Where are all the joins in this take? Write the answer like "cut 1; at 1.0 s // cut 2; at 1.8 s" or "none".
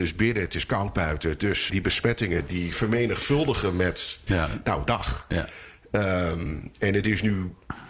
cut 1; at 1.7 s // cut 2; at 2.5 s // cut 3; at 4.9 s